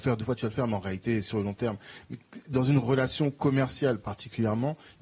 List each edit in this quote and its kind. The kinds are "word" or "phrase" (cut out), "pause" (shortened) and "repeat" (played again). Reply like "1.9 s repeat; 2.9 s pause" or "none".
none